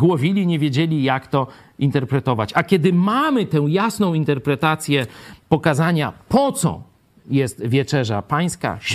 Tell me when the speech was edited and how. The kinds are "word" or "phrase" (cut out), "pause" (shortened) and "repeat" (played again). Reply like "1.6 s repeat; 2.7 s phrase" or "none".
none